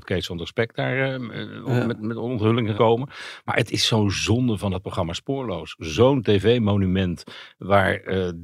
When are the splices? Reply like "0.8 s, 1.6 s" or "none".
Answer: 2.8 s